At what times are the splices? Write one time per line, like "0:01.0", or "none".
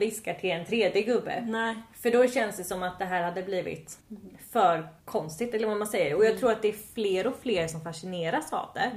0:04.0
0:05.0